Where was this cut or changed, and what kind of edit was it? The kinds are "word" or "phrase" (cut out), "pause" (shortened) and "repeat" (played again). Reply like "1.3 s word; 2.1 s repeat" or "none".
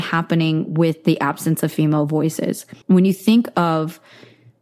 2.8 s pause

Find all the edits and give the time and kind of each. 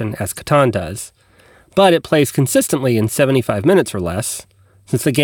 none

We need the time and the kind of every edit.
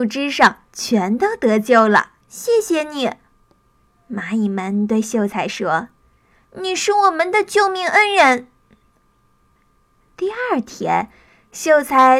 2.2 s pause

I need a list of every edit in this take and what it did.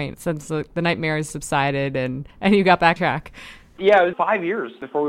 1.3 s word; 2.3 s pause; 3.0 s word; 4.1 s word

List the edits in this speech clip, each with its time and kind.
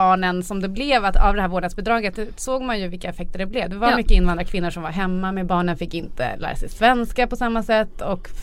5.5 s word

